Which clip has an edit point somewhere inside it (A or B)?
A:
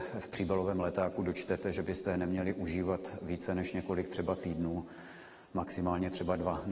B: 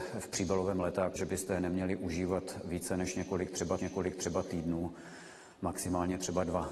B